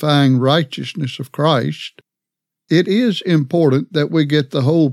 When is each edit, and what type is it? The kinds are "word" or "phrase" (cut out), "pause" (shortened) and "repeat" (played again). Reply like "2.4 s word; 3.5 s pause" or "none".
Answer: none